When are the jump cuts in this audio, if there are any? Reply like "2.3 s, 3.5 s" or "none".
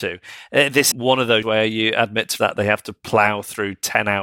0.9 s, 1.4 s, 2.4 s

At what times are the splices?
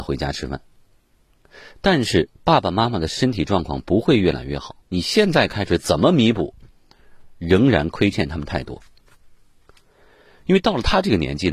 2.3 s, 4.8 s

